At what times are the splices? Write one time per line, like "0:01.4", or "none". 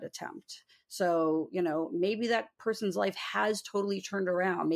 none